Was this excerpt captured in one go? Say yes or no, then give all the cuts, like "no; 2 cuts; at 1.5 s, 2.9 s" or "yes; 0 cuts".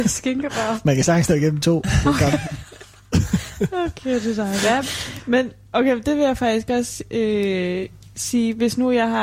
yes; 0 cuts